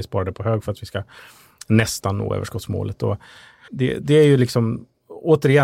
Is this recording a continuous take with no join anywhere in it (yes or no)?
no